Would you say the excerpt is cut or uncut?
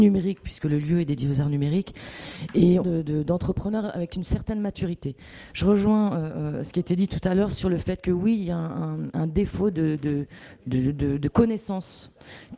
cut